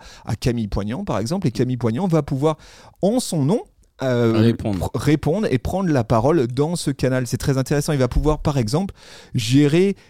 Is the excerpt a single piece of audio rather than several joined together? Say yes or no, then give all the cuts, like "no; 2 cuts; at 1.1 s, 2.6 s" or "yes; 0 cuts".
yes; 0 cuts